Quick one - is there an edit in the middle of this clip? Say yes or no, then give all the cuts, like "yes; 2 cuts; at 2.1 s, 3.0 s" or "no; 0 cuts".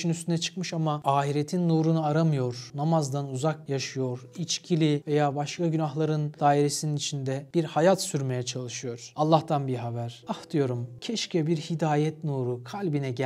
no; 0 cuts